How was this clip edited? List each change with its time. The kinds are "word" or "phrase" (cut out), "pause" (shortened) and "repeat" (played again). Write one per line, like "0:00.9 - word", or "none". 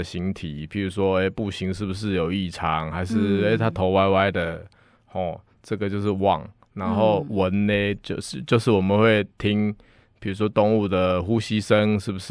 none